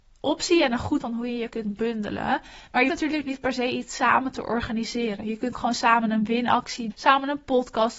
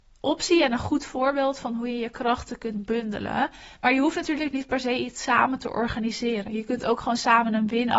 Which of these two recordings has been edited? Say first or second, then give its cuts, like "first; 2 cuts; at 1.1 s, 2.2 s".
first; 5 cuts; at 1.0 s, 1.5 s, 2.9 s, 5.5 s, 6.9 s